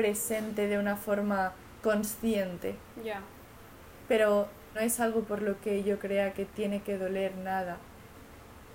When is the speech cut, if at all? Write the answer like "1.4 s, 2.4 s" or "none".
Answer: 4.7 s